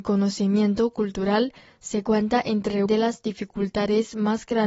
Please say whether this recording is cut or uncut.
cut